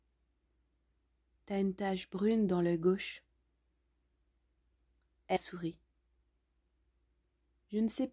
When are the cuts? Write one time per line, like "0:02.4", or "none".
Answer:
0:05.4